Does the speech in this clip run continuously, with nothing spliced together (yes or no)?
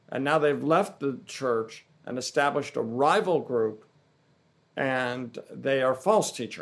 yes